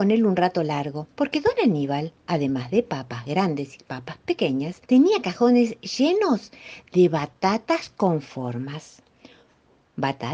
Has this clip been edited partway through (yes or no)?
yes